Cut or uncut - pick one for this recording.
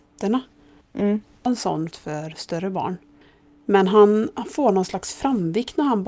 cut